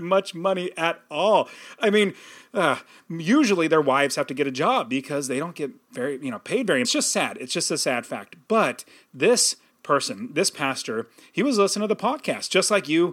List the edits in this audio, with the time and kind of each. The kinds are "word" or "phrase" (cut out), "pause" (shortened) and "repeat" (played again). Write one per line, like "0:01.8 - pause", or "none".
0:06.8 - phrase